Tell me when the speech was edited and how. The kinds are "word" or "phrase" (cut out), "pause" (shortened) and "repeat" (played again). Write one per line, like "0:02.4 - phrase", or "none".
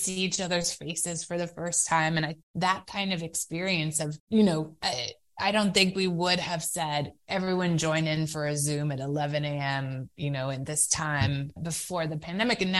0:02.4 - pause
0:04.2 - pause
0:11.6 - word